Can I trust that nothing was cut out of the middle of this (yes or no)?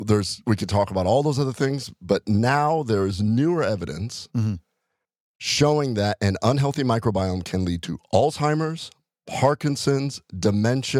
yes